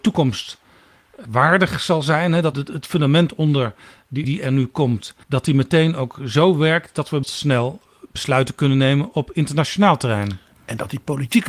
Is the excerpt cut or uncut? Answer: cut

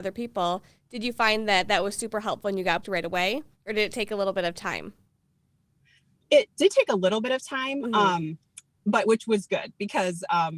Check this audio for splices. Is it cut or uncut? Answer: cut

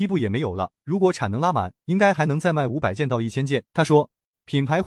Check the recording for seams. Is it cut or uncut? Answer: cut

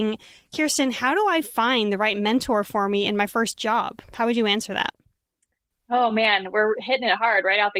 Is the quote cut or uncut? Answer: uncut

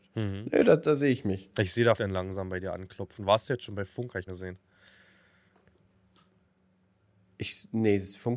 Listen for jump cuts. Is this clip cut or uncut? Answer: cut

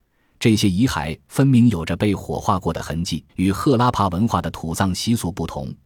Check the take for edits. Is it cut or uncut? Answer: cut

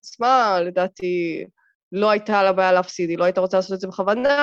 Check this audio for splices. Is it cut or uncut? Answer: uncut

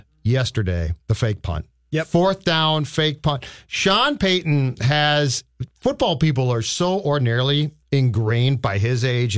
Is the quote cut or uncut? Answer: cut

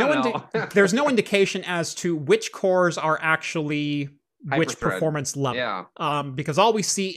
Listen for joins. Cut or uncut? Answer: uncut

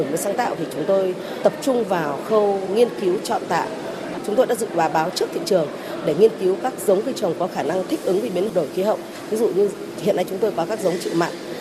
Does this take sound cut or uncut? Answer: uncut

